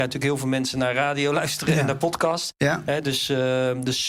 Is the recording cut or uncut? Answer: uncut